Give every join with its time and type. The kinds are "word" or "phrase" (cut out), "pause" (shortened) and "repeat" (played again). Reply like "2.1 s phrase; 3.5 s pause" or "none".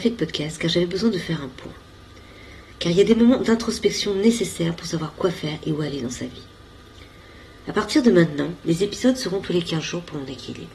none